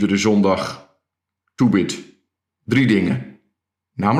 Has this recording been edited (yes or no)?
no